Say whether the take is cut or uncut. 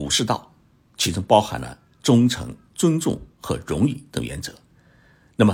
cut